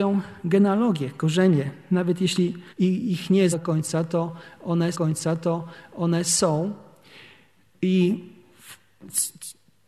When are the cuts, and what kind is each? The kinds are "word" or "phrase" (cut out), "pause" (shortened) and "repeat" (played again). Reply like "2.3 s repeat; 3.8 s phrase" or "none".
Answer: 2.7 s pause; 3.5 s word; 4.9 s repeat